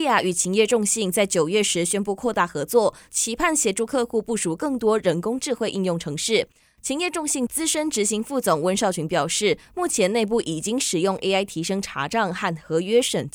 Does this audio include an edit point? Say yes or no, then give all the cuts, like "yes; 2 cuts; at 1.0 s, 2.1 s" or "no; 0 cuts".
no; 0 cuts